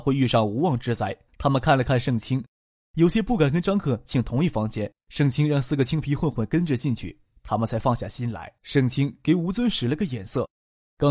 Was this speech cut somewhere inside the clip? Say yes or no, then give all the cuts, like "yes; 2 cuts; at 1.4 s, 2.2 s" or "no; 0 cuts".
yes; 3 cuts; at 1.3 s, 5.0 s, 8.6 s